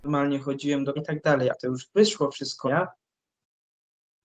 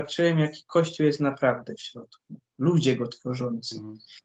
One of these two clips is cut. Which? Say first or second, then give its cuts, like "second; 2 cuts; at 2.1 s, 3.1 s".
first; 3 cuts; at 1.0 s, 1.5 s, 2.7 s